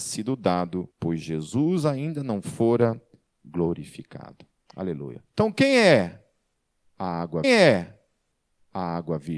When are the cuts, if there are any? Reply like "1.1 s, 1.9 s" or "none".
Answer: 0.9 s, 5.3 s, 7.4 s